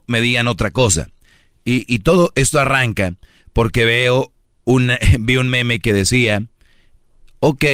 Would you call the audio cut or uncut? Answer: uncut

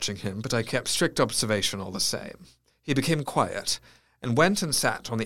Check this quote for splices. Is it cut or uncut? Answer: cut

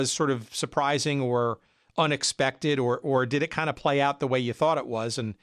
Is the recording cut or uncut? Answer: uncut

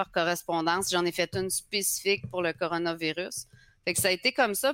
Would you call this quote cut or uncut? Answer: uncut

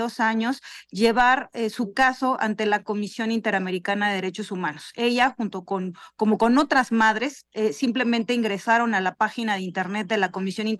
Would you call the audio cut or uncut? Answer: uncut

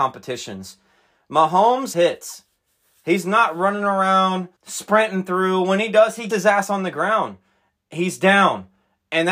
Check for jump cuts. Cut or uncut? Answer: cut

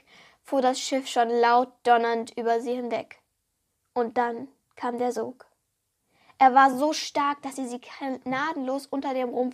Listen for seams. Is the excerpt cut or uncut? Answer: uncut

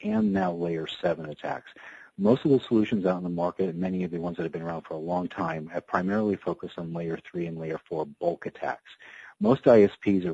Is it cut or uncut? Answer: uncut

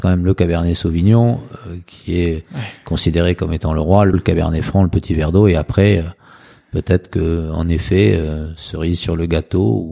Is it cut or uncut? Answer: cut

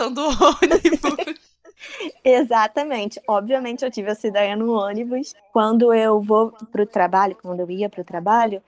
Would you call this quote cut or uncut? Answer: uncut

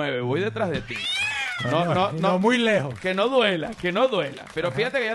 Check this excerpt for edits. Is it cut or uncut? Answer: uncut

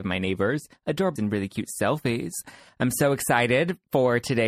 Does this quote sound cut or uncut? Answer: cut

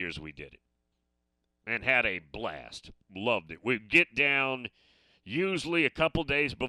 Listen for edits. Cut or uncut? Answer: cut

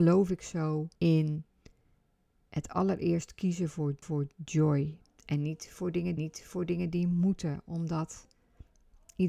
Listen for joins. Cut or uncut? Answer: cut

